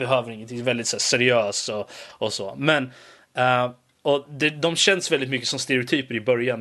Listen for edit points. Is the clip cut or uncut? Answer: uncut